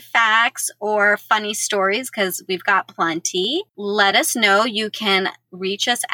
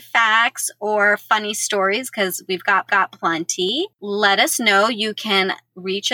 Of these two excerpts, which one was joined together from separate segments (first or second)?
second